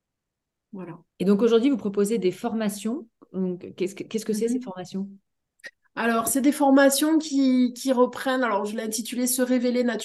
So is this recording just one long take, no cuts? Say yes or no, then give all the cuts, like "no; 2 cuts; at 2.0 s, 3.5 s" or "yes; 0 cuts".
no; 1 cut; at 1.1 s